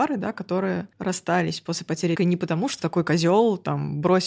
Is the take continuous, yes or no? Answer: no